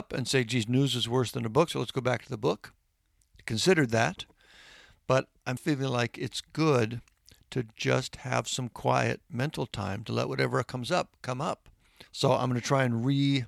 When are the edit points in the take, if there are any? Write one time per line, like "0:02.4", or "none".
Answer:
0:05.6
0:12.1